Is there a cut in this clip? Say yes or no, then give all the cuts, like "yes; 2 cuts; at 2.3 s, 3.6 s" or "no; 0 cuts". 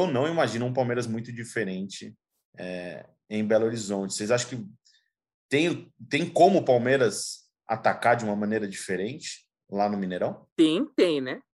no; 0 cuts